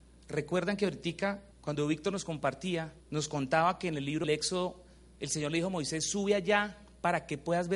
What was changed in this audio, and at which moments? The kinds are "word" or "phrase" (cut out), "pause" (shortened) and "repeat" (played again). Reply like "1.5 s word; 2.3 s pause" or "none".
1.5 s pause; 3.0 s pause; 4.2 s word